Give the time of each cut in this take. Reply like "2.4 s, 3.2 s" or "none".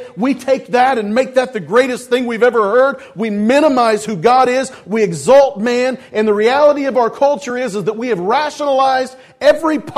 none